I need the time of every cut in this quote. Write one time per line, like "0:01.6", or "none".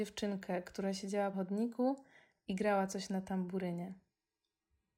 0:01.3